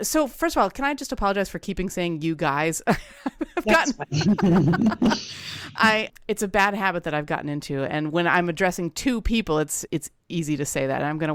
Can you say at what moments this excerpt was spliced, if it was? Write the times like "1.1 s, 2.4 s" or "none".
6.1 s, 9.9 s